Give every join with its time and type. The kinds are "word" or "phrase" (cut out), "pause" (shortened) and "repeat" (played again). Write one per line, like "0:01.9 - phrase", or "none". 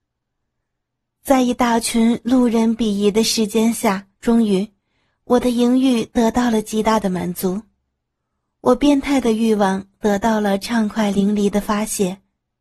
0:04.1 - pause